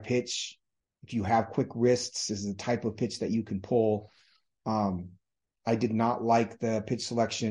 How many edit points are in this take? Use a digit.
0